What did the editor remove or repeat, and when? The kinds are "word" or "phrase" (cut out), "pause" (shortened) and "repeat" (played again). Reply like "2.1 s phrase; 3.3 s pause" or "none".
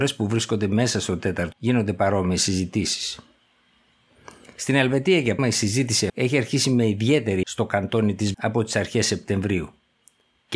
1.5 s word; 5.4 s word; 6.1 s word; 7.4 s word; 8.3 s word